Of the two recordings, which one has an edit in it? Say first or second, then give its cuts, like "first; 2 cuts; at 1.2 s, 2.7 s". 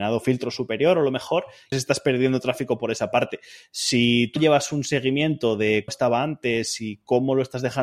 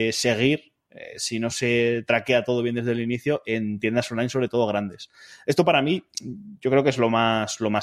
first; 3 cuts; at 1.7 s, 4.4 s, 5.9 s